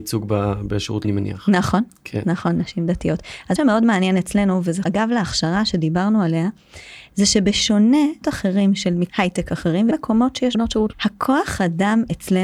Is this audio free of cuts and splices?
no; 8 cuts; at 1.0 s, 3.6 s, 4.8 s, 8.2 s, 9.1 s, 9.9 s, 10.5 s, 10.9 s

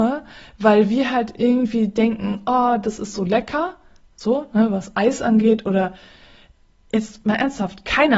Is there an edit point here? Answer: no; 0 cuts

